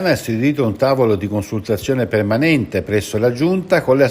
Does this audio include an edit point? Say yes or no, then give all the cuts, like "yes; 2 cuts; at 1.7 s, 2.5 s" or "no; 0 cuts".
no; 0 cuts